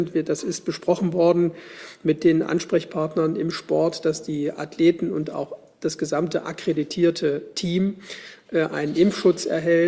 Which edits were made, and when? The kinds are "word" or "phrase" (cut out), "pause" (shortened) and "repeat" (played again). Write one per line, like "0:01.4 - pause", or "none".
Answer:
none